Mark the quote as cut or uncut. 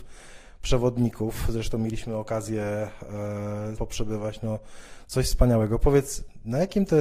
cut